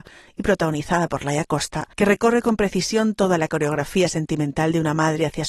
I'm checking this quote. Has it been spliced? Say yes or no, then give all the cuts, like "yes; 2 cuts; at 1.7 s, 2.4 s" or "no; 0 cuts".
yes; 1 cut; at 1.9 s